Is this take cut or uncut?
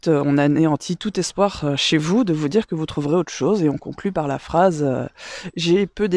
uncut